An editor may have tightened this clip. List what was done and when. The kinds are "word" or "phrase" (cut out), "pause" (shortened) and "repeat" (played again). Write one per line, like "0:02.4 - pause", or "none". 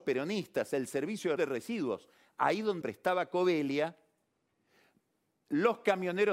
0:01.4 - word
0:02.8 - word